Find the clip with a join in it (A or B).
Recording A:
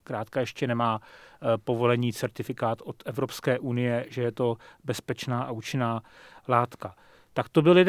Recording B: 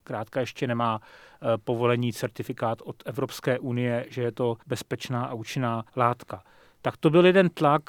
B